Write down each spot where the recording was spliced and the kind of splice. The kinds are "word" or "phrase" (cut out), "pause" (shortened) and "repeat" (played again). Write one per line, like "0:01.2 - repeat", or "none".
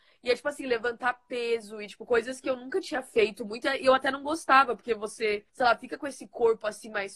0:05.5 - pause